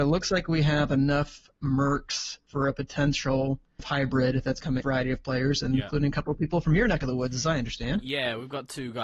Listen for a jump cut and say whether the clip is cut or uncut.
cut